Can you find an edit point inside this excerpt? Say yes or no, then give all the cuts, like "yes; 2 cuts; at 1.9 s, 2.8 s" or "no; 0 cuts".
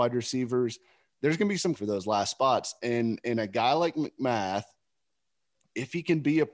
yes; 1 cut; at 1.8 s